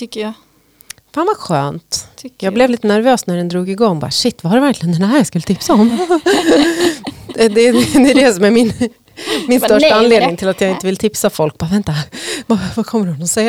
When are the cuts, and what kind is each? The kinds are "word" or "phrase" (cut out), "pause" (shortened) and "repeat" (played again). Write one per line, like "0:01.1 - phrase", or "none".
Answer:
none